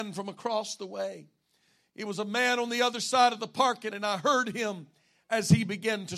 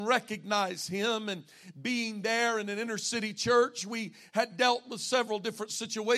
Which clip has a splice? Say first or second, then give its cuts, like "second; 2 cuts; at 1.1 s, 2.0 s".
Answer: first; 1 cut; at 3.9 s